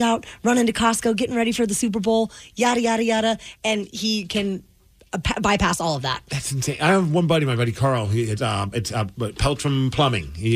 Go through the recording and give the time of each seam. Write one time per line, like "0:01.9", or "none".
none